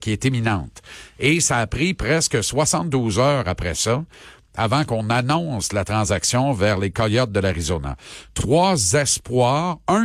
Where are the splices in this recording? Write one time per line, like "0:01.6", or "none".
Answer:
none